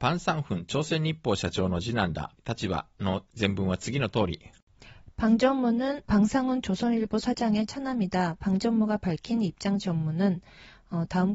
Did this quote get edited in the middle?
yes; 2 cuts; at 2.4 s, 6.0 s

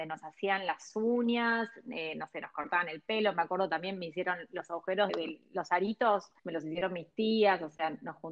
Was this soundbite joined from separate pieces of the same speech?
yes; 2 cuts; at 5.1 s, 6.4 s

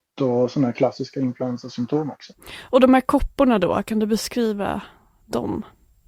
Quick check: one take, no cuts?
yes; 0 cuts

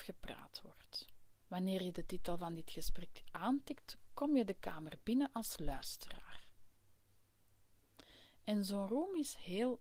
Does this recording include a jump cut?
yes; 1 cut; at 1.4 s

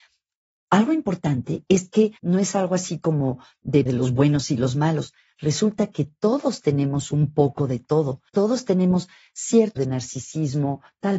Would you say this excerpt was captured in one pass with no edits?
no; 4 cuts; at 2.2 s, 3.9 s, 8.3 s, 9.8 s

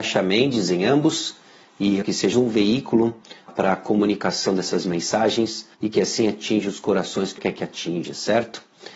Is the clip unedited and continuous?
no; 5 cuts; at 2.0 s, 2.3 s, 3.5 s, 5.7 s, 7.4 s

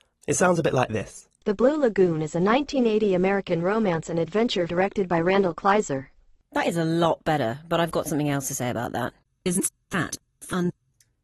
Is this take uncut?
no; 1 cut; at 4.7 s

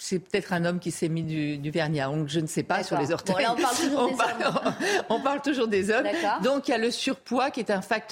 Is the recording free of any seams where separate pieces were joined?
yes; 0 cuts

